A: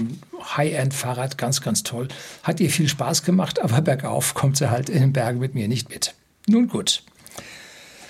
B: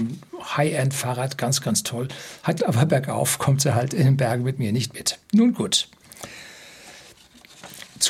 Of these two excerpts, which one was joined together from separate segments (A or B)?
B